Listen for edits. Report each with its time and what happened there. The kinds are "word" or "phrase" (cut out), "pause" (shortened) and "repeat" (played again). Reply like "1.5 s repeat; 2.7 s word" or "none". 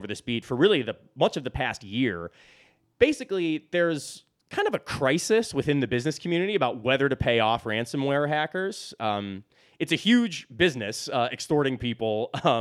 none